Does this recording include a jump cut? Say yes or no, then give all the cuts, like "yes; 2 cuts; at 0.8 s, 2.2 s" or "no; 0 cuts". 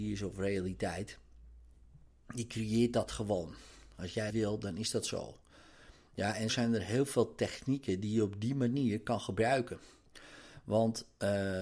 yes; 2 cuts; at 4.3 s, 6.5 s